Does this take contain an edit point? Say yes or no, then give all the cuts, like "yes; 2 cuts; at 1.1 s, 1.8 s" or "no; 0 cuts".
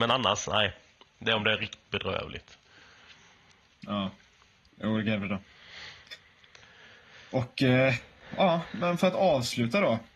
no; 0 cuts